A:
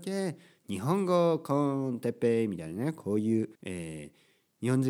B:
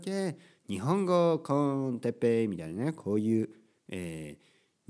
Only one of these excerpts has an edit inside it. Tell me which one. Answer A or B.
A